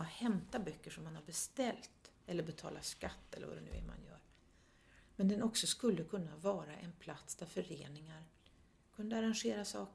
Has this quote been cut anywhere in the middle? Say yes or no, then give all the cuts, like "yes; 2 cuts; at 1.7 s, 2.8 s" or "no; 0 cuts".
yes; 1 cut; at 2.1 s